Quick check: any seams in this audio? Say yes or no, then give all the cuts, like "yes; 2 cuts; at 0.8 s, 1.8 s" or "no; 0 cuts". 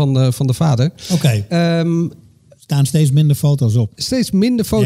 no; 0 cuts